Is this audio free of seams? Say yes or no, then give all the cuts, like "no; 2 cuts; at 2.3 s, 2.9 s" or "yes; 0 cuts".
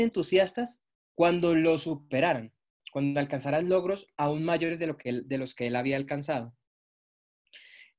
yes; 0 cuts